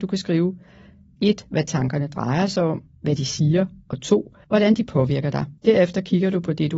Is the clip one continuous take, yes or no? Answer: no